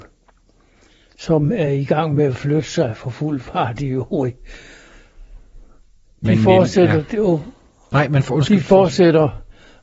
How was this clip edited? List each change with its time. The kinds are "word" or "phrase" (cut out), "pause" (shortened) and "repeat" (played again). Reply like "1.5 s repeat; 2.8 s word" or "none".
none